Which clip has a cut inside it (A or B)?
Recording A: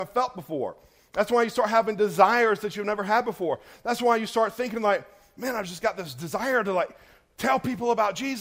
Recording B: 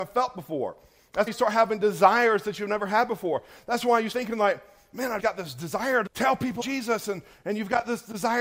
B